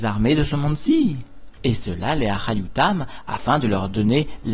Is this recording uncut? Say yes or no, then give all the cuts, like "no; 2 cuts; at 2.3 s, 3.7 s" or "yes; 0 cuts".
yes; 0 cuts